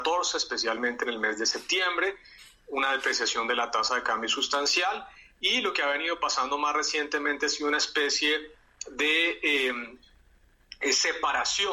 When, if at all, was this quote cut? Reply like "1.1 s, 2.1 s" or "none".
none